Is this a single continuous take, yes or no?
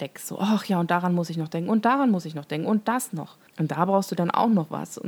no